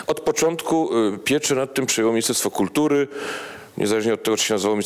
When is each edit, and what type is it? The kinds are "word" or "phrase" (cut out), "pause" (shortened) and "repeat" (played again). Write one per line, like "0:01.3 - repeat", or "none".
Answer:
none